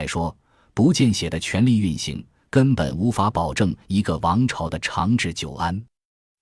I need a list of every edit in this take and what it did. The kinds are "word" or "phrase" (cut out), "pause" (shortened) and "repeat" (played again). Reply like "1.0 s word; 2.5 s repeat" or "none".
none